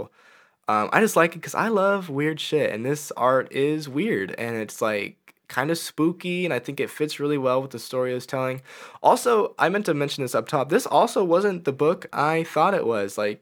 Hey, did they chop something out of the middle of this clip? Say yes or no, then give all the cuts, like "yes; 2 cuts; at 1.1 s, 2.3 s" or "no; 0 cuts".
no; 0 cuts